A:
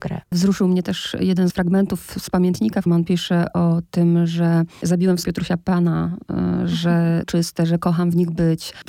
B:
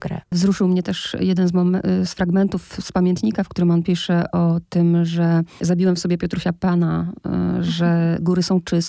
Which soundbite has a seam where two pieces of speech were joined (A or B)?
A